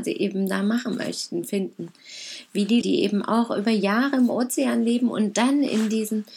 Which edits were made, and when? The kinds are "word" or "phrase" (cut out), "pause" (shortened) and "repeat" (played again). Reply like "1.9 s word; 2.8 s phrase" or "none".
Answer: 2.8 s word